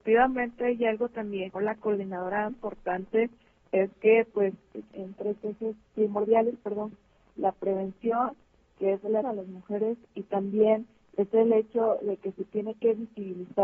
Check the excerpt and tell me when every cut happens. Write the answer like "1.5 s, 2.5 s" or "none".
1.6 s, 2.5 s, 4.9 s, 5.9 s, 6.9 s, 9.2 s